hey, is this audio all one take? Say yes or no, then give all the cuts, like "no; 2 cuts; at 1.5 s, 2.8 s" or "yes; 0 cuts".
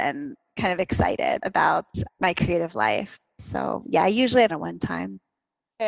no; 3 cuts; at 1.4 s, 2.1 s, 4.5 s